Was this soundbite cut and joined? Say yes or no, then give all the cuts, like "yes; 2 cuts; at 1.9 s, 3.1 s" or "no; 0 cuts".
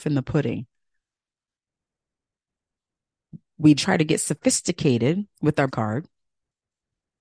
yes; 3 cuts; at 3.8 s, 5.3 s, 5.7 s